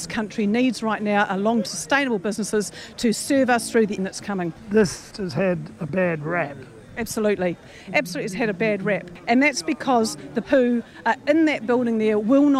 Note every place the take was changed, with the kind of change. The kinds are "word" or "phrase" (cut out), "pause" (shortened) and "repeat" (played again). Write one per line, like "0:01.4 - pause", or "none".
0:01.7 - word
0:04.0 - phrase
0:05.1 - word
0:05.9 - word
0:08.5 - word
0:10.4 - word